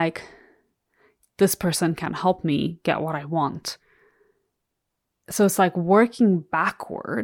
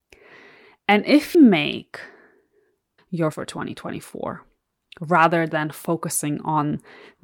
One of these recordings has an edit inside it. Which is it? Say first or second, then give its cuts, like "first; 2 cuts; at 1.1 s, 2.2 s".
second; 3 cuts; at 1.3 s, 3.0 s, 3.3 s